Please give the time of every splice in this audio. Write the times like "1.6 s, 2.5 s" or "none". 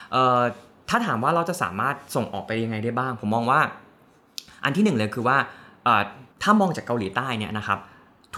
6.3 s